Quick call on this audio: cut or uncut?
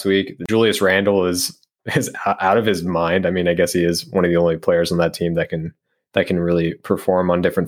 uncut